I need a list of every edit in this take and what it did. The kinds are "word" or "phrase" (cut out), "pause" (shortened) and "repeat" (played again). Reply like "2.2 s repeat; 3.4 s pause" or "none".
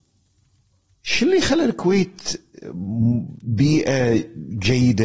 none